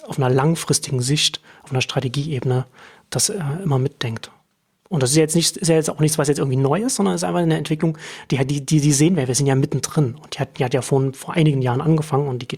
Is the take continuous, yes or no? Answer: yes